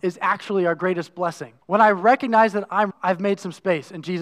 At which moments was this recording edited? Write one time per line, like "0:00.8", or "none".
0:01.6
0:02.9

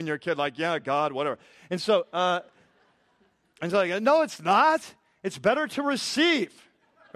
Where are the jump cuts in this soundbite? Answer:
none

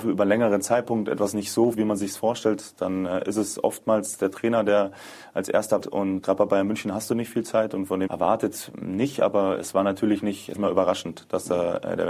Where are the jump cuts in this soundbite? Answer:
0:01.7
0:05.8
0:06.2
0:08.1
0:10.5

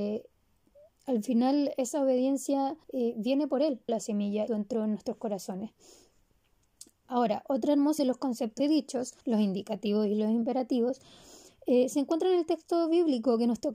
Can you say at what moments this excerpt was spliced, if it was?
0:02.8
0:03.9
0:04.5
0:08.0
0:08.6
0:09.2

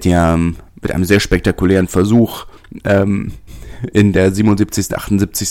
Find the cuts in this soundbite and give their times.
none

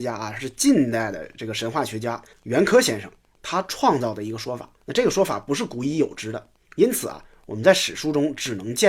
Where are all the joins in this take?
0:02.3
0:04.8
0:06.6

